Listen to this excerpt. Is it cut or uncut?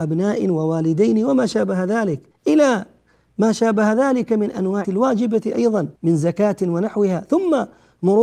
cut